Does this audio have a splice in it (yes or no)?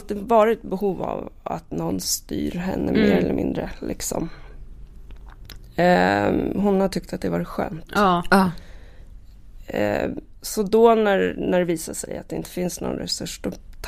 no